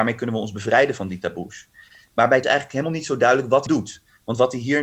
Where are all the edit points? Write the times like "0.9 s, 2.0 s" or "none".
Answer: 2.4 s, 3.7 s